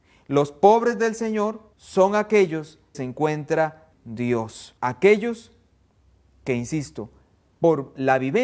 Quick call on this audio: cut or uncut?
cut